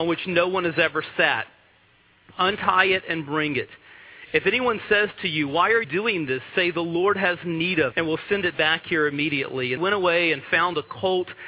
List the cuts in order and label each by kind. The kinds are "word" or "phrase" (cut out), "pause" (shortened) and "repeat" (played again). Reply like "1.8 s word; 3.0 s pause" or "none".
5.8 s word; 7.9 s word; 9.8 s word